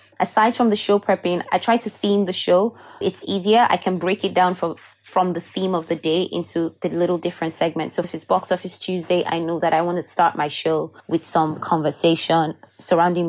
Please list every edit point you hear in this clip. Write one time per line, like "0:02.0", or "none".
0:01.4
0:03.0
0:08.0
0:11.0